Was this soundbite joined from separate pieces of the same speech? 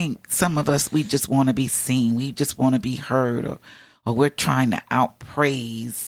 no; 0 cuts

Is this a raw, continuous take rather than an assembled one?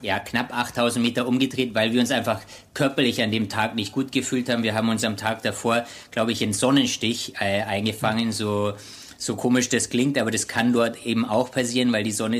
yes; 0 cuts

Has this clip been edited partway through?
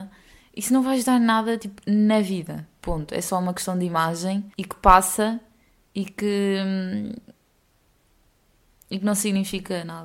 yes; 1 cut; at 4.5 s

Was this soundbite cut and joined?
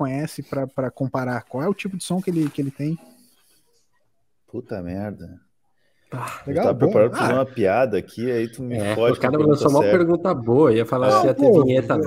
no; 0 cuts

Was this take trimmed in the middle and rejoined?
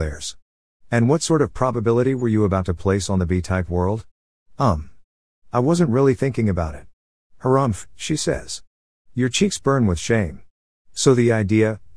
no; 0 cuts

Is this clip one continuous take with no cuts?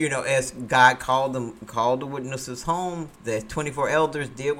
no; 1 cut; at 3.2 s

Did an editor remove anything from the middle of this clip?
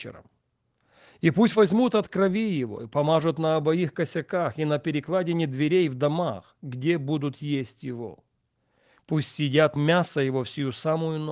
no; 0 cuts

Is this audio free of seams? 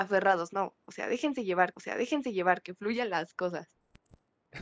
no; 1 cut; at 1.7 s

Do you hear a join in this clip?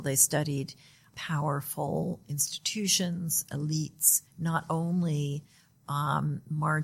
yes; 1 cut; at 4.3 s

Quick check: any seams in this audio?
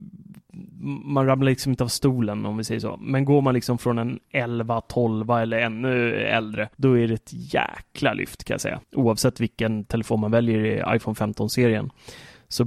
yes; 2 cuts; at 6.7 s, 8.8 s

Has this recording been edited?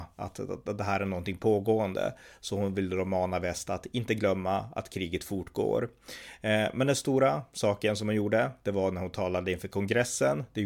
no; 0 cuts

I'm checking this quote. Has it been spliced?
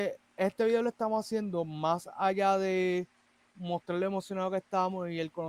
no; 0 cuts

